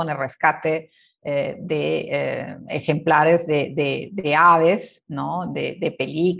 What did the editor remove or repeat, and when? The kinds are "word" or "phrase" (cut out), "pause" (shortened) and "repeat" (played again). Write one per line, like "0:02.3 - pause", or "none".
none